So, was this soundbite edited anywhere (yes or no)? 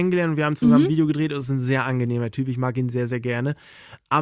no